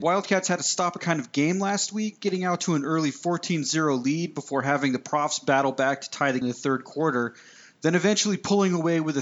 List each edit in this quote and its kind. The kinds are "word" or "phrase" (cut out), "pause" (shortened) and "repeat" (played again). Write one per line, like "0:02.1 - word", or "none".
0:01.0 - word
0:06.4 - word

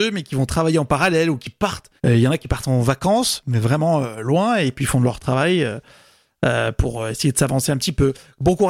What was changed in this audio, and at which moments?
0:02.0 - pause

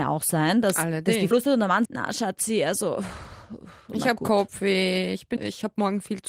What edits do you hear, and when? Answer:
0:01.3 - word
0:01.8 - word
0:05.4 - word

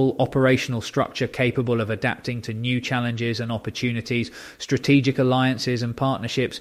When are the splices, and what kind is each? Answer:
none

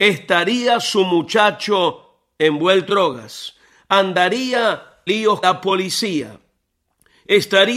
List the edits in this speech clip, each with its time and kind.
0:02.9 - word
0:05.1 - word
0:05.4 - word

